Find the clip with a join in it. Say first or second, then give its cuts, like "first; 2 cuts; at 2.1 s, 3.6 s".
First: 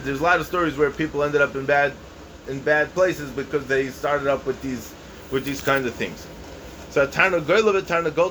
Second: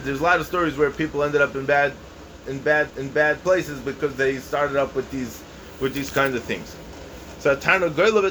second; 1 cut; at 2.9 s